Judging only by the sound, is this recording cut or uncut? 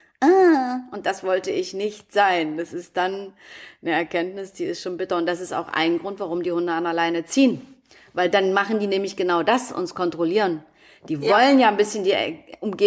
uncut